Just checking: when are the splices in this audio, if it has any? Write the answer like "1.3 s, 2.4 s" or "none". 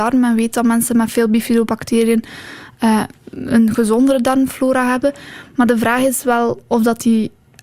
none